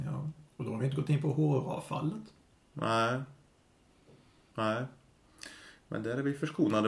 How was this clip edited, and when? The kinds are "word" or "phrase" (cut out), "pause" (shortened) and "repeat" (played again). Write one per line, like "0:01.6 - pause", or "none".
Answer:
none